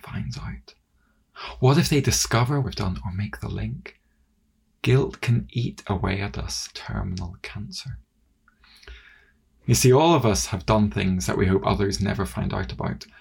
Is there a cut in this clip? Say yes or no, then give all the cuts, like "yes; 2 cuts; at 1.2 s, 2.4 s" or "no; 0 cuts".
yes; 2 cuts; at 2.6 s, 6.7 s